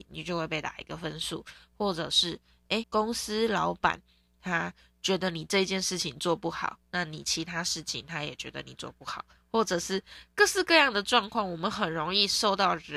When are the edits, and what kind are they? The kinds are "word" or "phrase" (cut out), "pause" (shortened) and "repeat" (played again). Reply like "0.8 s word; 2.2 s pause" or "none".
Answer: 2.8 s word